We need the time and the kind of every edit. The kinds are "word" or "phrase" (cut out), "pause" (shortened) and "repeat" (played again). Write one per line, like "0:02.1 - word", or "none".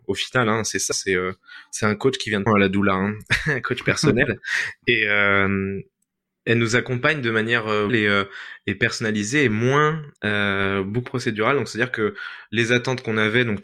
0:00.9 - word
0:02.5 - phrase
0:07.9 - phrase
0:10.2 - pause
0:11.1 - word